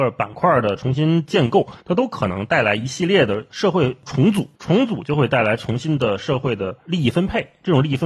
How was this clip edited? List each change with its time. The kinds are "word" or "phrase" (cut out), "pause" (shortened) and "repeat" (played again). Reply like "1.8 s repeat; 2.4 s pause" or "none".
1.8 s pause; 4.6 s pause